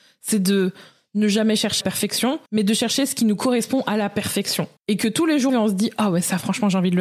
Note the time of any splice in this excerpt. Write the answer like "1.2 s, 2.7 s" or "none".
1.8 s, 2.5 s, 4.8 s, 5.5 s